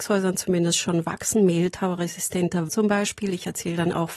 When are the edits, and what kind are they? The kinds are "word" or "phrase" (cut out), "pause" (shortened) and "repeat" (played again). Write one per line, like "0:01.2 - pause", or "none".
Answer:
0:02.7 - word